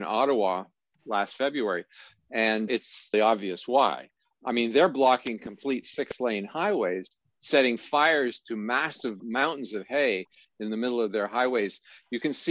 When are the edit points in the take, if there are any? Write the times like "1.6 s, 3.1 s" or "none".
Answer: 2.7 s, 3.1 s